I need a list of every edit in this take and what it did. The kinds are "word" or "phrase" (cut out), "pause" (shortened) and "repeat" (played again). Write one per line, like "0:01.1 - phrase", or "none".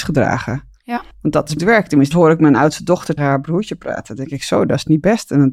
0:01.1 - pause
0:01.6 - phrase
0:02.1 - phrase
0:03.2 - word